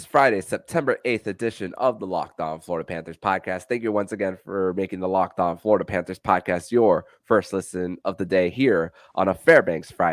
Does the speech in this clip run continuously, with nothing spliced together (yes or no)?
yes